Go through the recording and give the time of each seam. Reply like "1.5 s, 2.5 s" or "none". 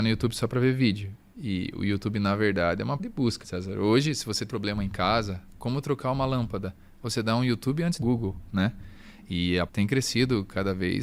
3.0 s, 3.4 s, 4.5 s, 8.0 s, 9.7 s